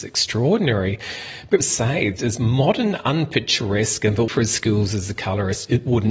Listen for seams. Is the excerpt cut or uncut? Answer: cut